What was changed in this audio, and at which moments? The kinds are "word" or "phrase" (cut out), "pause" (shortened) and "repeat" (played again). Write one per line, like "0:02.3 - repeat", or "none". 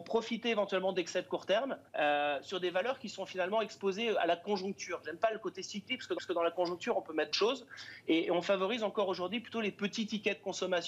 0:01.9 - pause
0:06.2 - repeat
0:07.3 - word